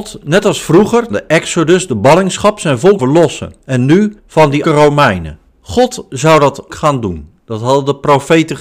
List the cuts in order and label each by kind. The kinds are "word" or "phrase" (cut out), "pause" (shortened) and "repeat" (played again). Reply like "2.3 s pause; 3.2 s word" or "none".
1.1 s phrase; 3.0 s word; 3.6 s pause; 4.2 s pause; 4.6 s word; 5.5 s pause; 6.7 s word